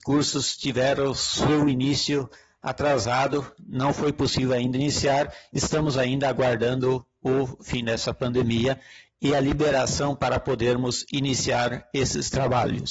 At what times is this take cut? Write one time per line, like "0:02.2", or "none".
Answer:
none